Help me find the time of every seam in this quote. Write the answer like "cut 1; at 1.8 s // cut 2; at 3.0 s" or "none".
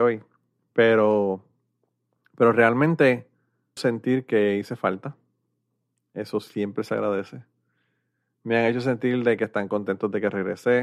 cut 1; at 3.8 s